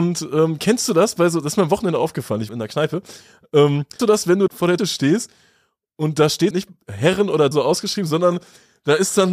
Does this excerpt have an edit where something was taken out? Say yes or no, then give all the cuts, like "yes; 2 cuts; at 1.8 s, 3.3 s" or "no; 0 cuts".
yes; 6 cuts; at 2.5 s, 4.0 s, 4.5 s, 4.8 s, 6.5 s, 7.5 s